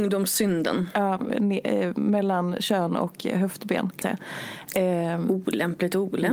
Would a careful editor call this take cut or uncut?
cut